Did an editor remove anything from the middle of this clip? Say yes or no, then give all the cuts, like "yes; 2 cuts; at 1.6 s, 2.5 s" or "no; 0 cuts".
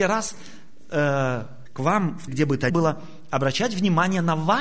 yes; 3 cuts; at 1.7 s, 2.3 s, 2.7 s